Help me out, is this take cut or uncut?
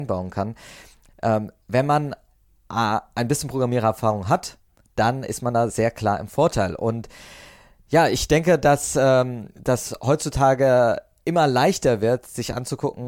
uncut